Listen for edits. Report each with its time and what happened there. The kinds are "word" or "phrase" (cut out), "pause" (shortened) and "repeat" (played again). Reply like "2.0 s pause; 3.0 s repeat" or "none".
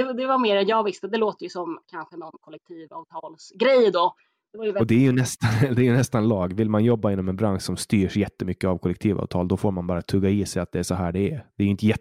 none